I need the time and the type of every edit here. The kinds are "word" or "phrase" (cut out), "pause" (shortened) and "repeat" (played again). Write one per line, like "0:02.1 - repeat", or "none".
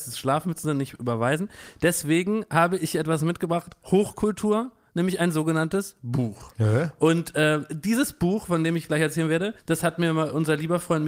0:09.6 - pause